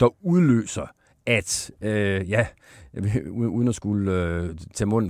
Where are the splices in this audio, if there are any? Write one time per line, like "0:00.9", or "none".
none